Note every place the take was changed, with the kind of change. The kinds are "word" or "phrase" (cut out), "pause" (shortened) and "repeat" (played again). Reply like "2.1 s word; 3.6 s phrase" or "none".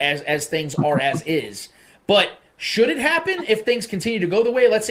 none